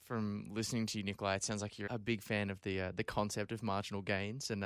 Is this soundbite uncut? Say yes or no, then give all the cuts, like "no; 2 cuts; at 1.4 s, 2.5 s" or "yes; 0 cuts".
no; 1 cut; at 1.9 s